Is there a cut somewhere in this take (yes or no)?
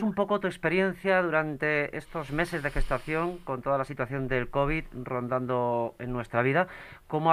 no